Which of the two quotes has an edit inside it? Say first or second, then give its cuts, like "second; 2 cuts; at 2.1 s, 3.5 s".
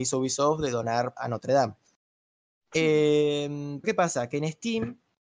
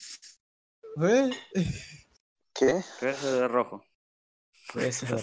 first; 2 cuts; at 1.2 s, 3.8 s